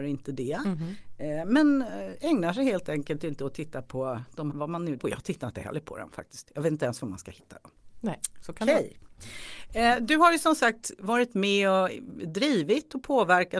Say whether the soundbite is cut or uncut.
cut